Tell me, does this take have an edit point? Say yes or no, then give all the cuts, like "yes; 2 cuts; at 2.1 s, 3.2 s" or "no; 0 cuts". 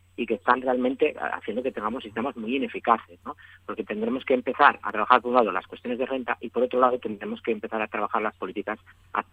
no; 0 cuts